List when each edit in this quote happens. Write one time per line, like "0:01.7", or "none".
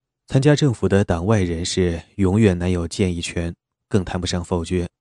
none